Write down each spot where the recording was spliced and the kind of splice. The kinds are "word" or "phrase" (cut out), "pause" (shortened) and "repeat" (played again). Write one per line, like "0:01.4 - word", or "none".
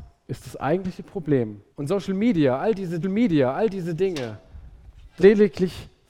0:01.7 - pause
0:03.0 - repeat
0:05.2 - word